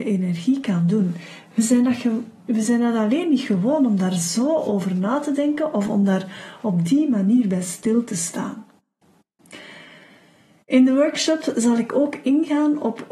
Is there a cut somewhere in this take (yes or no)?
no